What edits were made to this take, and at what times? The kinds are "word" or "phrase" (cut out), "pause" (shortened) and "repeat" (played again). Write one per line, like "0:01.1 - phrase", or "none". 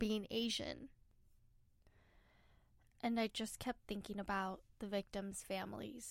none